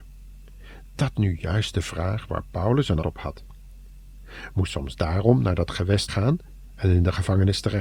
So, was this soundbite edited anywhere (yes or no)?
yes